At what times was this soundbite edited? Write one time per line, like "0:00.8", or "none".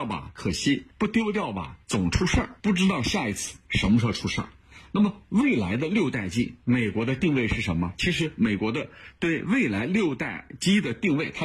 0:00.9
0:01.8
0:02.6